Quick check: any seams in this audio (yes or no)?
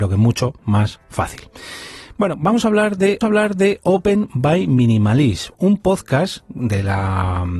yes